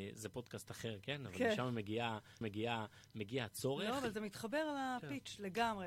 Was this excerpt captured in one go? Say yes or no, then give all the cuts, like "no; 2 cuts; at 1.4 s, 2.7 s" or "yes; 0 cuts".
no; 1 cut; at 2.4 s